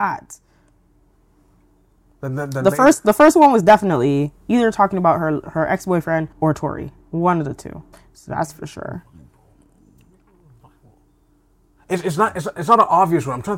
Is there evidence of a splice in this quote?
yes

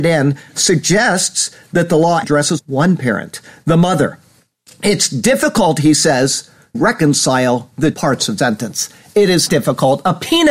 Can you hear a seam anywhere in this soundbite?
yes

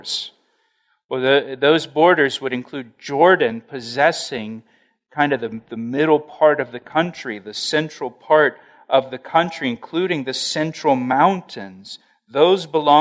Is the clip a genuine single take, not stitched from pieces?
yes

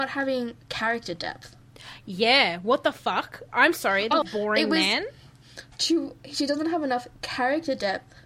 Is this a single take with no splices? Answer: no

